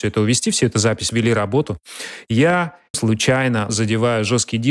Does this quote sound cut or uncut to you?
cut